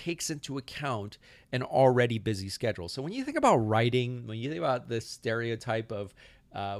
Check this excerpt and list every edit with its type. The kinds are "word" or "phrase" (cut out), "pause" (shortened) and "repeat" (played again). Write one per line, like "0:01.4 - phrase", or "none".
none